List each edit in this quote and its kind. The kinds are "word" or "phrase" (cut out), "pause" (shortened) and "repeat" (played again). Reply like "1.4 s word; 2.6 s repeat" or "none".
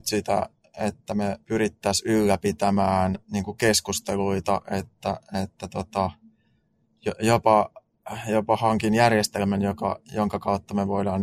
1.4 s pause; 3.2 s pause